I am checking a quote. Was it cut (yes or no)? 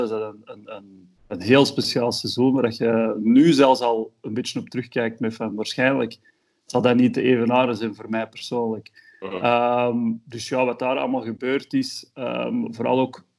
yes